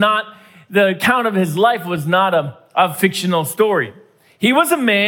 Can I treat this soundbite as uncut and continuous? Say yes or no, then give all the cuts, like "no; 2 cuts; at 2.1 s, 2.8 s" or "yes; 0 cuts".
yes; 0 cuts